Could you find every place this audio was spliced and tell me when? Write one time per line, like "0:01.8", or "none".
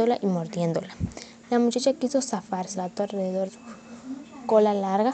0:02.7
0:03.5